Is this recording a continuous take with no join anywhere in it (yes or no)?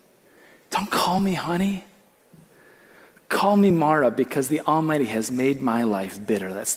yes